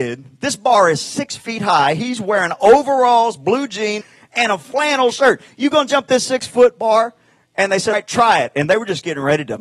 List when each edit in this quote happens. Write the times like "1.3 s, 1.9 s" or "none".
4.0 s, 7.9 s

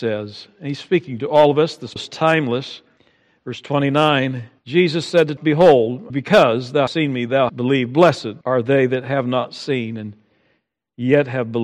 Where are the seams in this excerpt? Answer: 2.0 s, 3.0 s, 4.6 s, 5.4 s, 6.1 s, 6.9 s, 7.5 s, 8.4 s

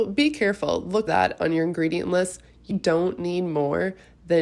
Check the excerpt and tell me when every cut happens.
1.1 s, 2.7 s

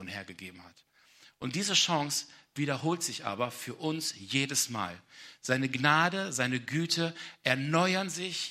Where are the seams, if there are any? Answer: none

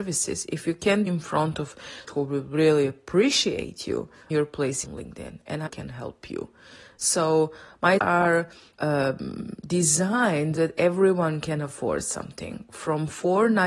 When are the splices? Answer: 1.1 s, 2.1 s, 4.3 s, 4.8 s, 5.7 s, 8.0 s, 8.8 s, 10.6 s

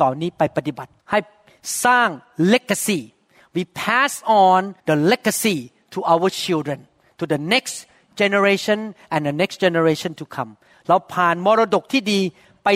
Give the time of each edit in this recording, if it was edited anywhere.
1.0 s, 4.8 s

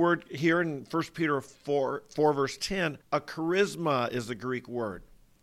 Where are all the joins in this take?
3.0 s

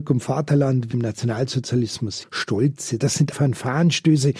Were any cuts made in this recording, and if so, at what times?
0.9 s, 2.2 s, 3.0 s, 3.3 s

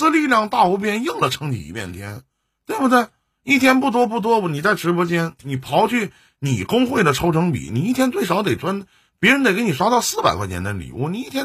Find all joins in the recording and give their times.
none

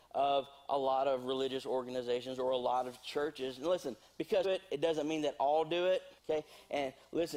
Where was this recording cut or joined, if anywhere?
4.4 s, 6.2 s

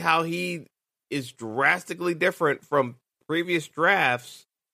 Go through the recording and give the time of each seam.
none

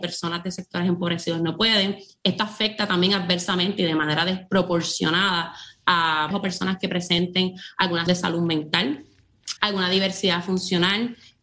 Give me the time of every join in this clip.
6.3 s, 8.1 s, 9.6 s

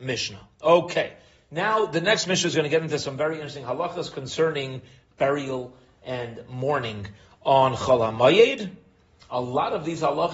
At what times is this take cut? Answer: none

